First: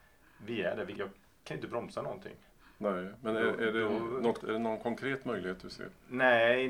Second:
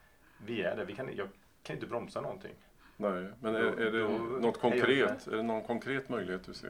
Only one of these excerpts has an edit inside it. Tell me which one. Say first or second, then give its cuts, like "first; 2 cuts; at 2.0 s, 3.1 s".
first; 2 cuts; at 1.0 s, 4.4 s